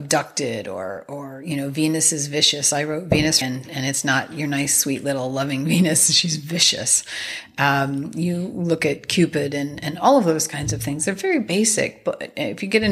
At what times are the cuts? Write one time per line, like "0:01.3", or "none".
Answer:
0:03.4